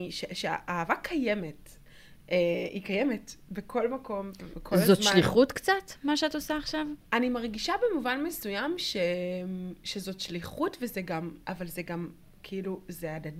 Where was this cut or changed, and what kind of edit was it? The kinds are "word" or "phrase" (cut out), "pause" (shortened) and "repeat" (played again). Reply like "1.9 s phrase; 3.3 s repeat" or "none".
11.4 s pause